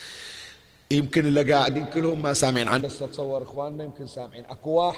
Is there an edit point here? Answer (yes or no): yes